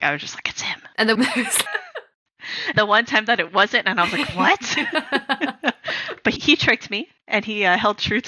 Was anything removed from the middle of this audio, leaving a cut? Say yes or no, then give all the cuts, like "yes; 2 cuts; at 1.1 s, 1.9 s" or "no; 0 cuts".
yes; 4 cuts; at 1.2 s, 1.7 s, 2.7 s, 6.4 s